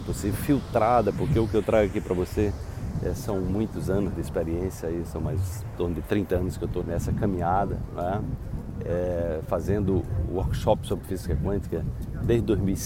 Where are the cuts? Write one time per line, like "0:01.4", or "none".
0:06.8